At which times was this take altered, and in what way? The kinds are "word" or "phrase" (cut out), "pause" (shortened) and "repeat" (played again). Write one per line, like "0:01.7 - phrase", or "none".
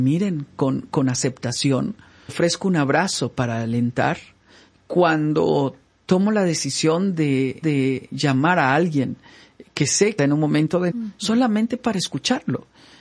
0:02.3 - word
0:07.6 - repeat
0:10.2 - word
0:10.9 - word